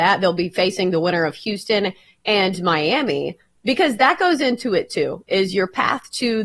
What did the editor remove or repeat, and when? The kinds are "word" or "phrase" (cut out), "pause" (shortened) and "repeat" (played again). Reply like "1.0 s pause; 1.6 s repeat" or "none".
none